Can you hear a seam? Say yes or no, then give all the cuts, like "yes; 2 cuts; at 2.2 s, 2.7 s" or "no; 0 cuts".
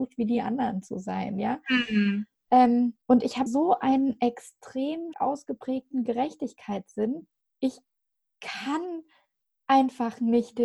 yes; 3 cuts; at 3.0 s, 3.5 s, 5.1 s